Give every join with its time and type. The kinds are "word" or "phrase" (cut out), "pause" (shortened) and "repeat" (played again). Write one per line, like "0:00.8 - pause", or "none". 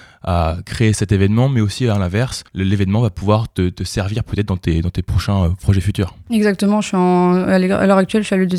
0:02.5 - pause